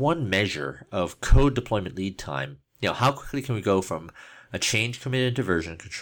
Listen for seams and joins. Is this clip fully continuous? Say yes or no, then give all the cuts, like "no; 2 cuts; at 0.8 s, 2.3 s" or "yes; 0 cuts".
yes; 0 cuts